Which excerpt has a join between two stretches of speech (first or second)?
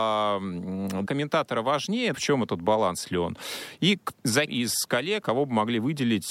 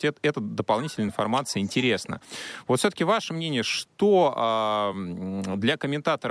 first